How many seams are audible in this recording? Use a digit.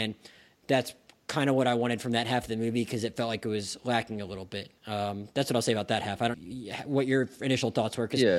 2